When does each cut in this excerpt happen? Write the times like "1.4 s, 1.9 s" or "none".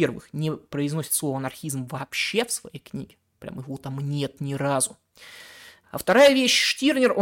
none